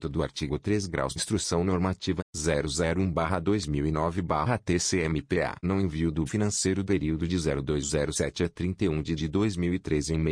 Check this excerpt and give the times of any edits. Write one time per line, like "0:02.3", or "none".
0:01.2
0:02.2
0:05.6
0:06.3
0:06.8
0:09.2